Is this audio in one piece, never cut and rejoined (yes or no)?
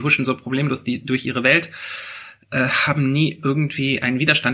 yes